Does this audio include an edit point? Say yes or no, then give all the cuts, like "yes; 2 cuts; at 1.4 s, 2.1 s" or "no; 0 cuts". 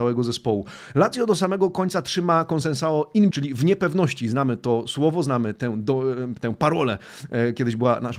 yes; 1 cut; at 3.3 s